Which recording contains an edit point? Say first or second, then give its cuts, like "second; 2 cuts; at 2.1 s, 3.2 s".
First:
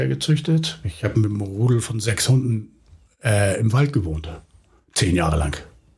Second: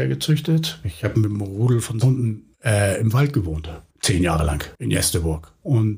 second; 4 cuts; at 2.0 s, 2.5 s, 3.9 s, 4.7 s